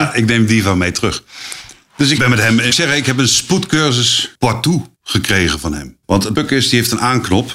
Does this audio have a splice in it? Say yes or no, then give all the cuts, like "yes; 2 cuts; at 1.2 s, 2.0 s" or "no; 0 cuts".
yes; 5 cuts; at 2.2 s, 2.7 s, 4.9 s, 6.0 s, 6.3 s